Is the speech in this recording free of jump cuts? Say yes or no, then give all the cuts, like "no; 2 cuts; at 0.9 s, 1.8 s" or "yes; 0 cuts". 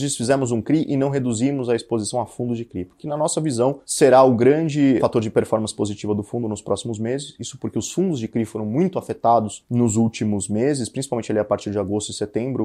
yes; 0 cuts